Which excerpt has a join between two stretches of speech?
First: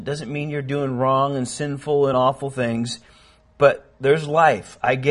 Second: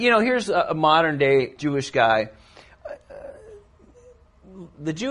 second; 1 cut; at 1.6 s

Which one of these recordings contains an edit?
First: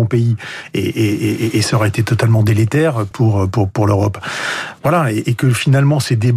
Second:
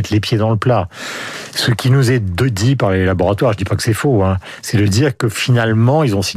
first; 1 cut; at 3.1 s

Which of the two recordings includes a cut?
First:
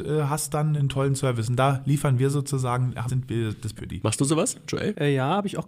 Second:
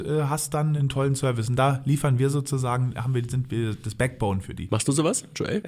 first; 2 cuts; at 3.1 s, 3.8 s

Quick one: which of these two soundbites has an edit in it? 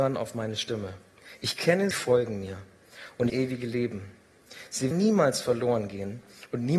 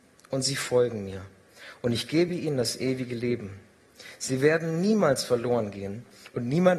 first; 3 cuts; at 1.9 s, 3.3 s, 4.9 s

